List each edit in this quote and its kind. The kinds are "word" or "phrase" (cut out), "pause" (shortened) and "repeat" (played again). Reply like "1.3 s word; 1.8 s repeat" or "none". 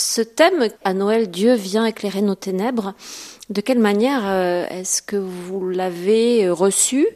none